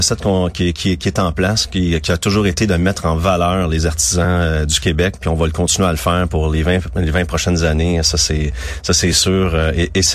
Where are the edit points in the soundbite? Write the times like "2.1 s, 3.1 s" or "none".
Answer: none